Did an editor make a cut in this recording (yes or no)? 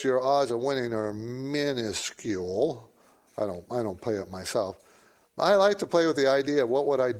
no